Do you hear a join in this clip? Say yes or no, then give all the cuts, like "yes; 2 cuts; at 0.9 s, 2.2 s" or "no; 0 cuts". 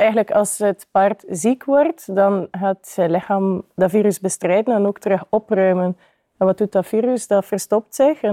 no; 0 cuts